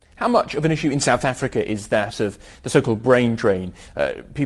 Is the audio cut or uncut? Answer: uncut